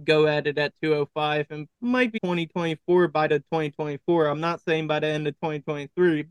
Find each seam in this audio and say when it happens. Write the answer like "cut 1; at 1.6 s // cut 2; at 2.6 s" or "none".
cut 1; at 1.7 s // cut 2; at 2.2 s // cut 3; at 3.3 s

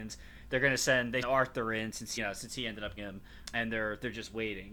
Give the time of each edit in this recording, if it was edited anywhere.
cut 1; at 1.2 s // cut 2; at 2.2 s // cut 3; at 3.0 s // cut 4; at 3.4 s

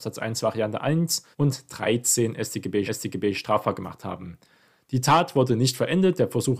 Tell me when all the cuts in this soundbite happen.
cut 1; at 1.3 s // cut 2; at 2.8 s

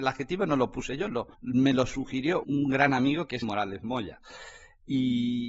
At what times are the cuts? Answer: cut 1; at 1.3 s // cut 2; at 2.4 s // cut 3; at 3.4 s

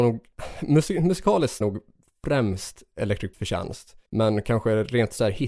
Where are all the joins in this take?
cut 1; at 1.6 s // cut 2; at 3.3 s // cut 3; at 4.1 s

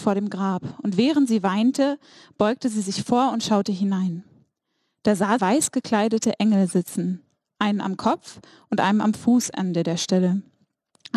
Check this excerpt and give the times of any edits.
cut 1; at 5.4 s

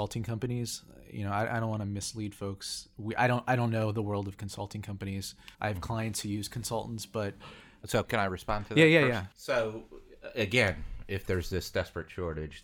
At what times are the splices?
cut 1; at 5.5 s // cut 2; at 9.3 s

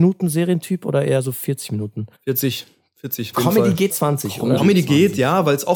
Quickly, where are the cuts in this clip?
cut 1; at 2.1 s // cut 2; at 3.3 s // cut 3; at 3.9 s // cut 4; at 4.6 s

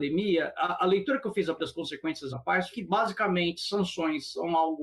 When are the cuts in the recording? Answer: cut 1; at 1.6 s // cut 2; at 2.3 s // cut 3; at 2.7 s

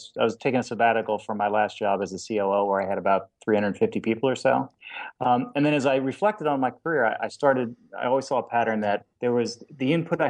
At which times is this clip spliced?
cut 1; at 9.1 s

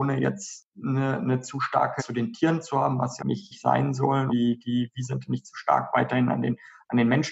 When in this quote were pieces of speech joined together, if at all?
cut 1; at 2.0 s // cut 2; at 3.2 s // cut 3; at 4.3 s

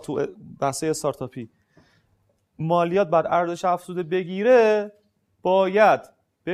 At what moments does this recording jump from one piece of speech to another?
none

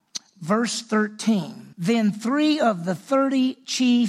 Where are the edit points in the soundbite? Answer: cut 1; at 1.7 s

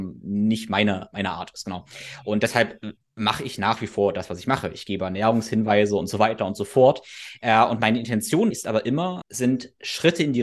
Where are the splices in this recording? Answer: cut 1; at 3.0 s // cut 2; at 8.5 s // cut 3; at 9.2 s

